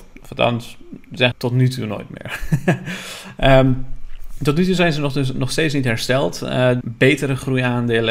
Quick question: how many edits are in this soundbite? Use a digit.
2